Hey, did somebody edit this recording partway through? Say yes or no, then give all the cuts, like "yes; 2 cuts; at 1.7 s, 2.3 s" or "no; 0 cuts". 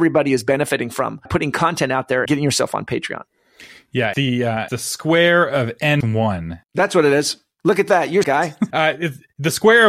yes; 7 cuts; at 1.3 s, 2.3 s, 4.1 s, 4.7 s, 6.0 s, 8.2 s, 8.7 s